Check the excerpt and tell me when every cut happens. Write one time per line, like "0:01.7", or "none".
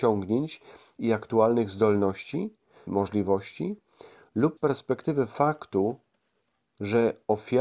0:02.9
0:04.6